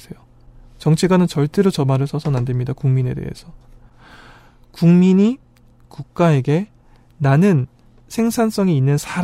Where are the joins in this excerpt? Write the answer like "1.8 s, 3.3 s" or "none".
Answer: none